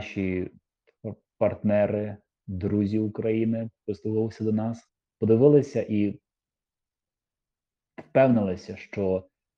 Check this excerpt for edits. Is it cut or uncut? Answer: uncut